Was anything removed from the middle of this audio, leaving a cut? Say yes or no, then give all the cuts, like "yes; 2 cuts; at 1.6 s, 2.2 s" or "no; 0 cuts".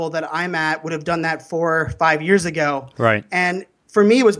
no; 0 cuts